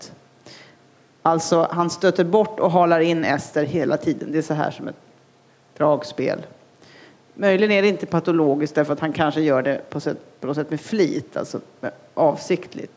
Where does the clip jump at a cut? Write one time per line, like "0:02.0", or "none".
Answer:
none